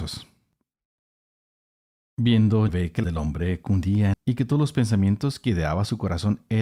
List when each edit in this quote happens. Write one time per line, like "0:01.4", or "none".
0:02.7
0:03.0
0:04.1